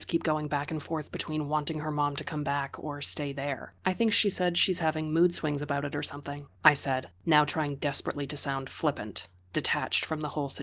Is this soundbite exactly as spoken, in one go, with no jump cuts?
no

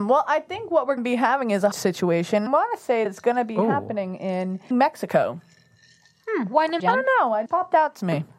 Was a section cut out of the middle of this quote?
yes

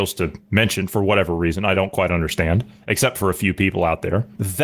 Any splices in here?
no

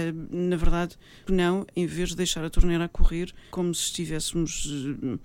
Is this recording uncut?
no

